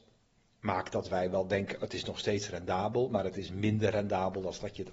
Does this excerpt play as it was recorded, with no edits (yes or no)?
yes